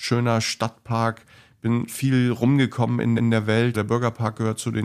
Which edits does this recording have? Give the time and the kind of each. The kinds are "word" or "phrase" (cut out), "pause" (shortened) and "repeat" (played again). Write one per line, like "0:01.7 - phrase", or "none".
0:01.9 - word
0:03.2 - repeat
0:03.7 - word